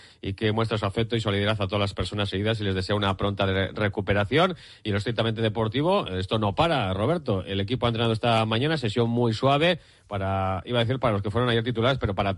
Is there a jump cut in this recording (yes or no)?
no